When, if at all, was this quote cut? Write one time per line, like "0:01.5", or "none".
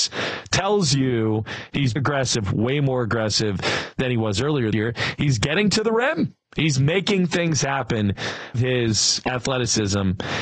0:02.0
0:04.7
0:06.4
0:08.5